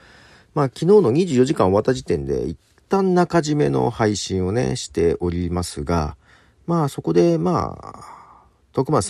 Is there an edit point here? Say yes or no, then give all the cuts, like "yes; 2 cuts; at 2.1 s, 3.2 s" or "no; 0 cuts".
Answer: no; 0 cuts